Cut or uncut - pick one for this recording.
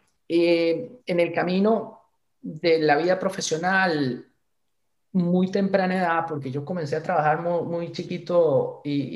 cut